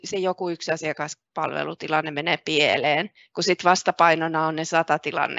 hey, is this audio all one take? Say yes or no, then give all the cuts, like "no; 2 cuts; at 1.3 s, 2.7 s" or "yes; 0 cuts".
yes; 0 cuts